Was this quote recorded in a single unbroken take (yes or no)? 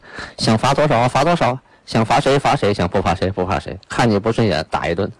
yes